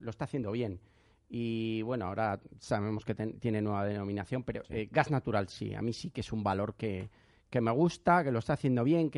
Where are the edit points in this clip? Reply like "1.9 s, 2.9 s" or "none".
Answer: none

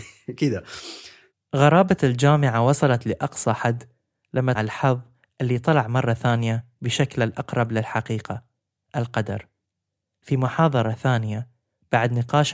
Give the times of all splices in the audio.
4.6 s

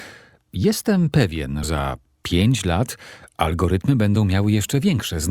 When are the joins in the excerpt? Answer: 1.6 s

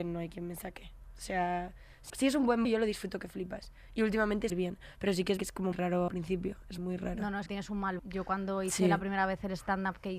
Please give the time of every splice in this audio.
2.1 s, 2.6 s, 4.5 s, 5.4 s, 5.7 s, 6.1 s, 6.8 s, 7.5 s, 8.0 s

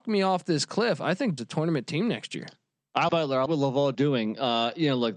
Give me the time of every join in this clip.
1.4 s, 3.1 s, 3.5 s, 3.9 s

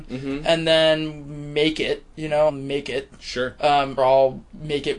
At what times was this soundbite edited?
2.5 s, 4.0 s

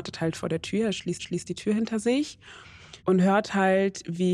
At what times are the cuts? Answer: 1.2 s, 3.0 s

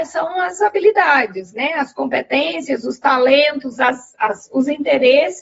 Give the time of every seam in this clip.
none

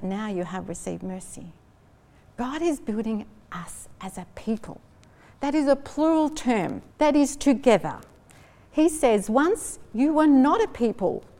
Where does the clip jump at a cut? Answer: 6.9 s

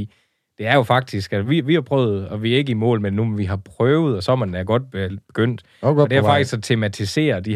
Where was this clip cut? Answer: none

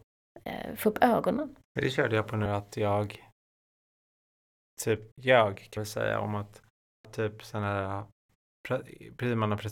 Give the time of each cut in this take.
1.6 s, 2.5 s, 5.1 s, 5.8 s, 7.0 s

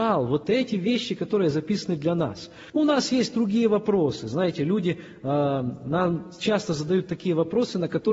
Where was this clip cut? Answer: 2.7 s

